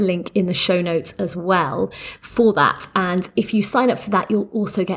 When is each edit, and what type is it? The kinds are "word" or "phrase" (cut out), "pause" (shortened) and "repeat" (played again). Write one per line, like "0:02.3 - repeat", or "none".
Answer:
none